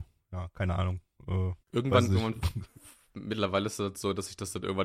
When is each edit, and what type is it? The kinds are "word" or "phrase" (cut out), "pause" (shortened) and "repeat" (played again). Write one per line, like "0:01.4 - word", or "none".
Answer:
0:01.6 - pause

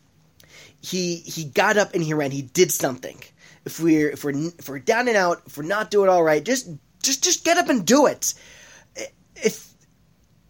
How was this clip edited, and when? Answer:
none

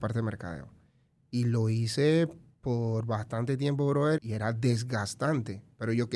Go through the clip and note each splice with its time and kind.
0:04.2 - word

